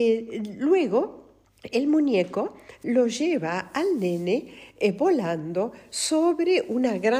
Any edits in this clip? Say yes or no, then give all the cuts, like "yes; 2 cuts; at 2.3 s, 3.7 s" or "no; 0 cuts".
yes; 1 cut; at 1.4 s